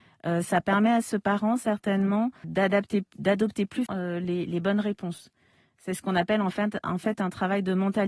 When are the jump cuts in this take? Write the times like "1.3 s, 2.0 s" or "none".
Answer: 2.4 s, 3.9 s, 4.5 s

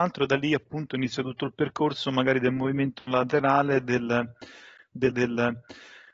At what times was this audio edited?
5.1 s

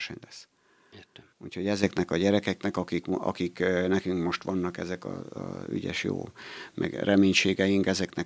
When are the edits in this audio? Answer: 1.3 s

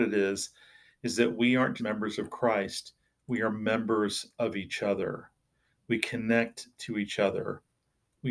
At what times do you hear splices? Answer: 1.8 s, 3.0 s

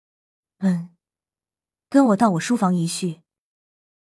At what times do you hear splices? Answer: none

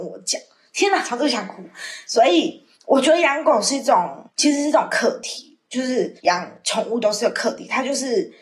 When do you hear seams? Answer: 2.7 s, 6.2 s

